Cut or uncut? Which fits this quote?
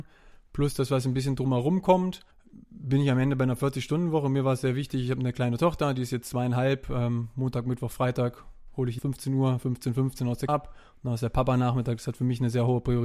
cut